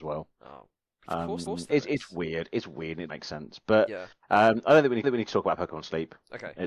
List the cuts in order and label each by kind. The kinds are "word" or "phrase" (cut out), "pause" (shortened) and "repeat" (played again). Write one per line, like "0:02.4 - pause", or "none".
0:01.5 - repeat
0:03.1 - word
0:05.0 - repeat